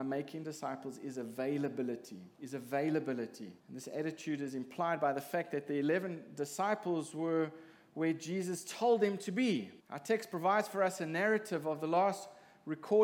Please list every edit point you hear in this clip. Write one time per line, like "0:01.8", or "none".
0:02.3
0:03.6
0:09.8